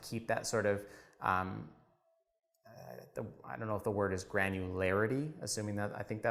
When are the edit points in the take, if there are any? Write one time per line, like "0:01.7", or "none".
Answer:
none